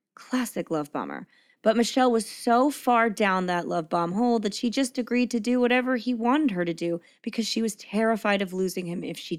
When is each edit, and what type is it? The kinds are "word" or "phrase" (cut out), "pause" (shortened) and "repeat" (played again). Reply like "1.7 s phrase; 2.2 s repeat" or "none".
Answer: none